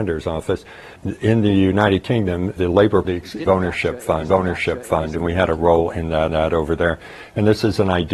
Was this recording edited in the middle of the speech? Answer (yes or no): yes